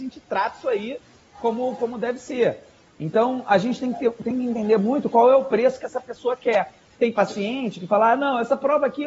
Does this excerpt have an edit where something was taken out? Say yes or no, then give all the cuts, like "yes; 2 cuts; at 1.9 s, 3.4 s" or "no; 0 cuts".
no; 0 cuts